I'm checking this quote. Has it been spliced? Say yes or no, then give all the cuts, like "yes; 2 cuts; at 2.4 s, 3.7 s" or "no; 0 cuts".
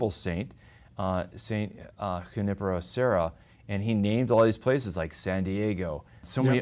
no; 0 cuts